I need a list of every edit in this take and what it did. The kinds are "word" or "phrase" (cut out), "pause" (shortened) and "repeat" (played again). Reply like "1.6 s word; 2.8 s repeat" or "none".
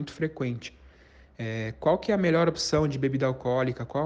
none